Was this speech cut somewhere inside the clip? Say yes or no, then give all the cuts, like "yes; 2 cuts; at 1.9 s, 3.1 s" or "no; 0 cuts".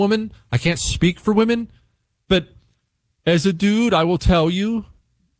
no; 0 cuts